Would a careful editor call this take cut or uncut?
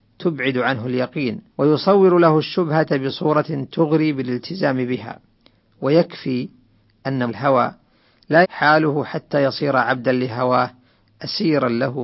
cut